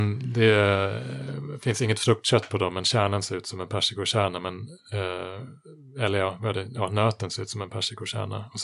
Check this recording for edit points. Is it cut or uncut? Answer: uncut